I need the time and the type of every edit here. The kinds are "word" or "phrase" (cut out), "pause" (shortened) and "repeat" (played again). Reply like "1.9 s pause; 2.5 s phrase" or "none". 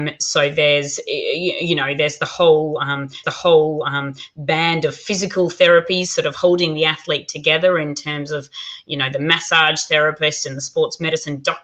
3.2 s repeat